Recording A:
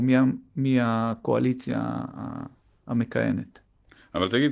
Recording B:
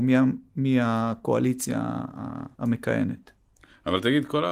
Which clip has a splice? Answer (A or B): B